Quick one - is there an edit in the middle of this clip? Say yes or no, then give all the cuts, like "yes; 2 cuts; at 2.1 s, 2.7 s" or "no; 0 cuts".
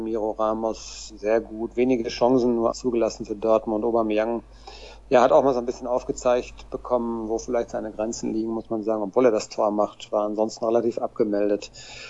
yes; 1 cut; at 2.7 s